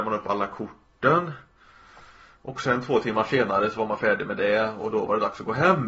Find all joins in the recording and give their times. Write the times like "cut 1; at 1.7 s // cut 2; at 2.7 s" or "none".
none